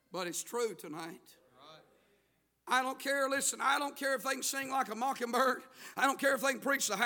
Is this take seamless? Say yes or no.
yes